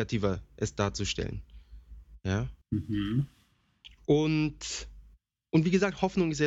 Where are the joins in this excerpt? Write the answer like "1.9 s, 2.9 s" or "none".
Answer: 2.6 s, 5.2 s

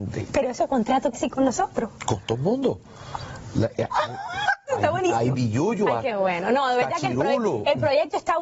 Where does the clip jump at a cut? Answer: 1.1 s, 5.3 s, 6.1 s

